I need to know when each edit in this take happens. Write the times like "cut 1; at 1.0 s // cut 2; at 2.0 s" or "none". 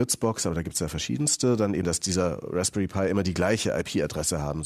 cut 1; at 1.8 s